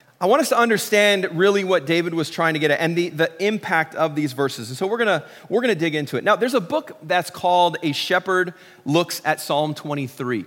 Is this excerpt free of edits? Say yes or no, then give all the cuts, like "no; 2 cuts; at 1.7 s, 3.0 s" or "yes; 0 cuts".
yes; 0 cuts